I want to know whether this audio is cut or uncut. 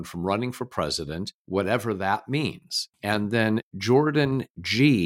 uncut